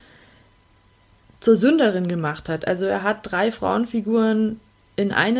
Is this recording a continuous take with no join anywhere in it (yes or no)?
yes